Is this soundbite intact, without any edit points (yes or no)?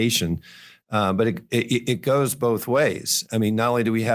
yes